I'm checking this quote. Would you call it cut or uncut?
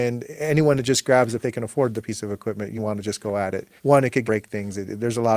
cut